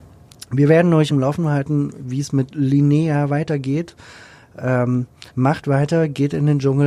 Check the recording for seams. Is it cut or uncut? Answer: cut